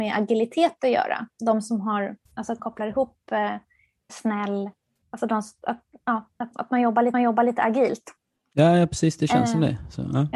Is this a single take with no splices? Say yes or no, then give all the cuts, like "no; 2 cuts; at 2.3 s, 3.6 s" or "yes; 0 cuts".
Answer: no; 5 cuts; at 2.3 s, 2.6 s, 4.1 s, 6.5 s, 7.1 s